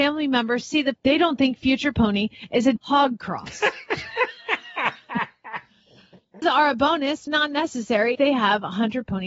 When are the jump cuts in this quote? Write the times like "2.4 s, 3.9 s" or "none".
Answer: 0.9 s, 2.8 s, 6.4 s, 7.3 s, 8.1 s